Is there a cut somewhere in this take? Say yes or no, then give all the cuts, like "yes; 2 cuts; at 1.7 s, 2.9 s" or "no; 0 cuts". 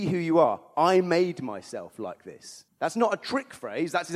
yes; 1 cut; at 2.7 s